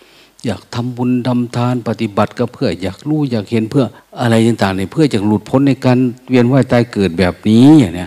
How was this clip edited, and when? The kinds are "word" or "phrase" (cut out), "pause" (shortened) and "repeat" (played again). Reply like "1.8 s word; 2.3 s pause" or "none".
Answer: 4.0 s pause